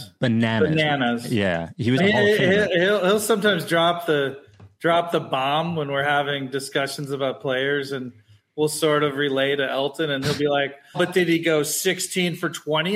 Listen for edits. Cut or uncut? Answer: cut